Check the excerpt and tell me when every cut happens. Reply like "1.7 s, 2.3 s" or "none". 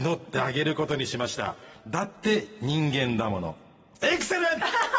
none